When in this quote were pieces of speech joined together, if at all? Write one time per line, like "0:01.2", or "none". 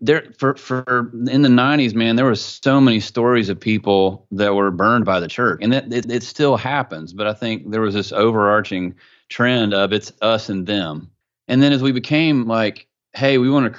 0:05.6
0:06.0
0:11.2